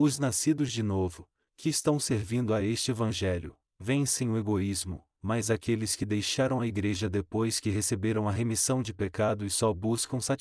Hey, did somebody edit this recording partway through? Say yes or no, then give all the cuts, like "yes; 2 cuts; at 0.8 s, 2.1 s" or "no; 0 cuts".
no; 0 cuts